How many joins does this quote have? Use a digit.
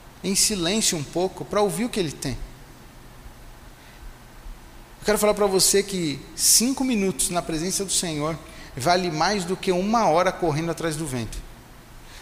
0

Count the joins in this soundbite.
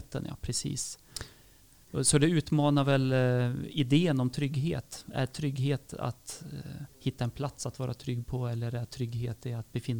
1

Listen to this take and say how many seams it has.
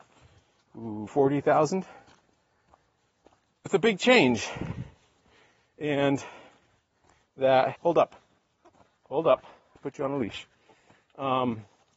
5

